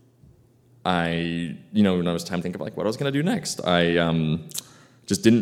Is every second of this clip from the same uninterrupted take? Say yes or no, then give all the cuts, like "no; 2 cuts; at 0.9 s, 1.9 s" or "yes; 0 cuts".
no; 1 cut; at 2.4 s